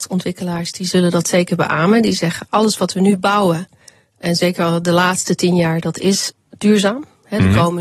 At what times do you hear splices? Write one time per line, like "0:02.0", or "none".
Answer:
none